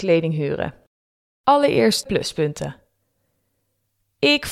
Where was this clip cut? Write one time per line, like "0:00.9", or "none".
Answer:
0:02.1